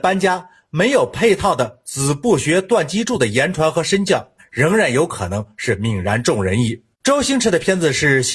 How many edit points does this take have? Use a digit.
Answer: 2